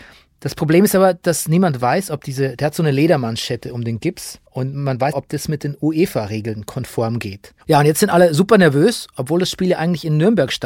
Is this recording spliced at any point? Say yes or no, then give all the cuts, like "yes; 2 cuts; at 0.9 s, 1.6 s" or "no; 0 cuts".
yes; 3 cuts; at 4.5 s, 5.1 s, 7.6 s